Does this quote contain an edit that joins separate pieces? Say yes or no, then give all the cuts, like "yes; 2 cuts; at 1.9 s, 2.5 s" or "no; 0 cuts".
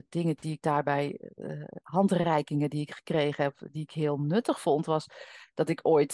no; 0 cuts